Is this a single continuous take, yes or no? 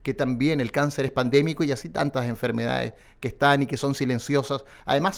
yes